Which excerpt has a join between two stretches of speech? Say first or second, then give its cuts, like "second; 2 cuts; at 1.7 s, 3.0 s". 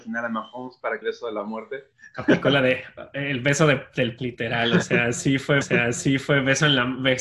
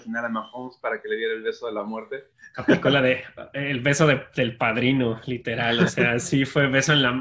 first; 3 cuts; at 1.0 s, 4.2 s, 5.6 s